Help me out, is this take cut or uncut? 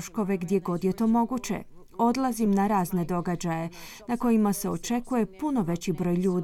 uncut